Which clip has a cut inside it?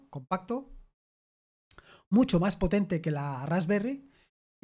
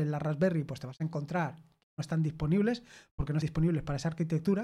second; 1 cut; at 3.4 s

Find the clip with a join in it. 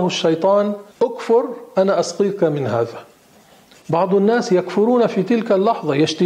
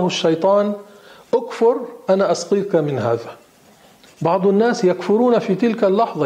first; 1 cut; at 0.9 s

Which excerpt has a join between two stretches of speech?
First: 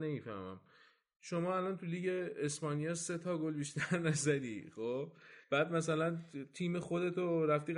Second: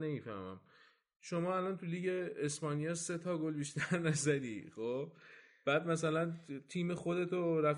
first; 1 cut; at 5.4 s

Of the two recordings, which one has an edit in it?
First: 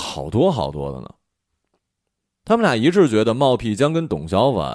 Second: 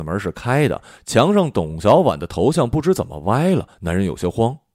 second; 1 cut; at 3.7 s

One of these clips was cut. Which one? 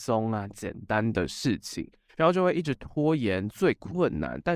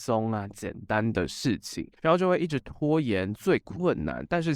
second; 1 cut; at 2.0 s

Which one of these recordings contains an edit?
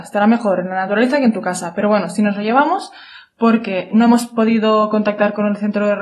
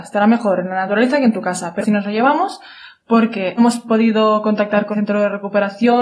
second; 3 cuts; at 1.8 s, 3.6 s, 4.9 s

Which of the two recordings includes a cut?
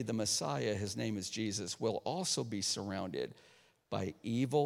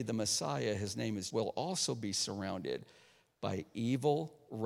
second; 1 cut; at 1.3 s

